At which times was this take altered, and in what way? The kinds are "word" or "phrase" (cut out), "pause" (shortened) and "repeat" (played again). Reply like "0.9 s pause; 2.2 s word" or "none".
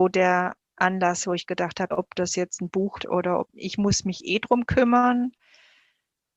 1.9 s word; 3.0 s word; 3.5 s phrase